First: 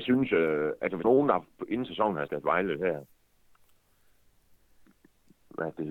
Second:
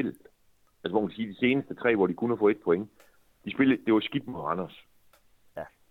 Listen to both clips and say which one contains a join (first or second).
first